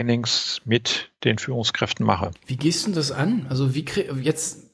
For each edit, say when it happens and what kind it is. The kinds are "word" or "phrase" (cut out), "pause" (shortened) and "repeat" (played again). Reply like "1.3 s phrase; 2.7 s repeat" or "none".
none